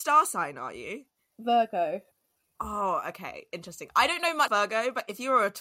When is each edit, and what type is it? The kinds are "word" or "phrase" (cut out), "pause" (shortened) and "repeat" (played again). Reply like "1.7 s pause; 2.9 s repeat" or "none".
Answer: 4.5 s word